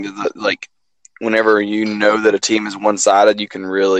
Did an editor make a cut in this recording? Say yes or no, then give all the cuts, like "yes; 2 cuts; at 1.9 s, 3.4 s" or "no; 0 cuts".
no; 0 cuts